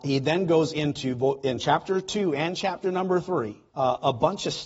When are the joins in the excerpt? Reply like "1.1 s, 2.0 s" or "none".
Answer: 3.7 s

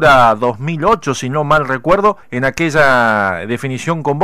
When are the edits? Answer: 2.2 s

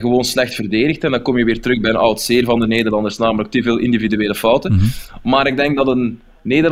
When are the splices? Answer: none

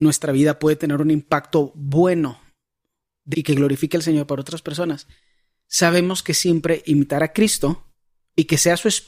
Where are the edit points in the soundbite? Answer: 3.3 s

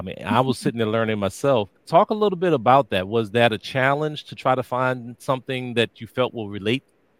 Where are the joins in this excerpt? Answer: 1.8 s

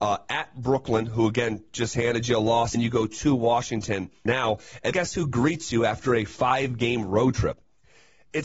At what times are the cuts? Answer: 2.7 s, 4.3 s, 4.9 s

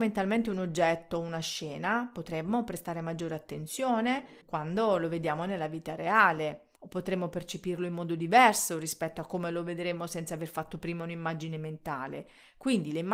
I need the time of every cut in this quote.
4.4 s, 6.8 s

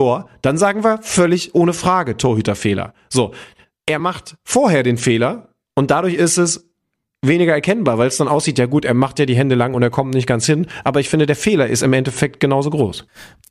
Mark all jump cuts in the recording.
none

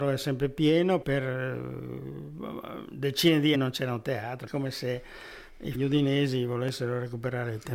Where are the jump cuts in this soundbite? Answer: 1.0 s, 3.5 s, 4.5 s, 5.7 s

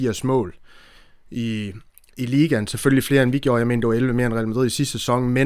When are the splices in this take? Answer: none

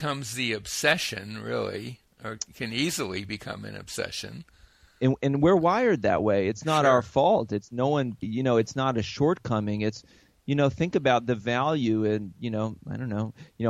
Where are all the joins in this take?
8.2 s

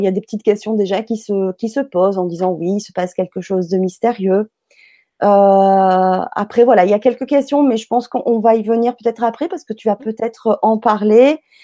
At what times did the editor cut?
none

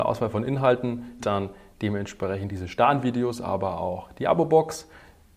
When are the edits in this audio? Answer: 1.2 s

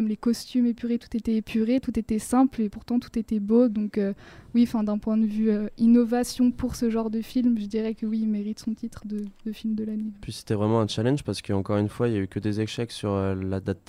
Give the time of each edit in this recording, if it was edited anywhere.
none

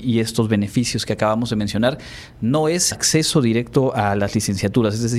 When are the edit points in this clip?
2.9 s

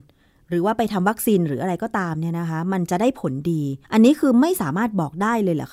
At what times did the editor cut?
3.8 s

